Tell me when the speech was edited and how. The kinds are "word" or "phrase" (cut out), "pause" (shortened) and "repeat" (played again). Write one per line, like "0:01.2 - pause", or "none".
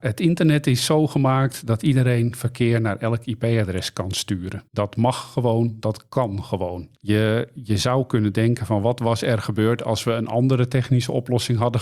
0:04.7 - pause
0:06.9 - pause